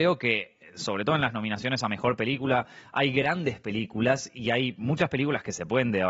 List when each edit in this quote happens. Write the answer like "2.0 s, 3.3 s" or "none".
none